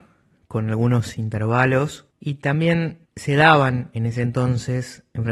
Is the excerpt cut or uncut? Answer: cut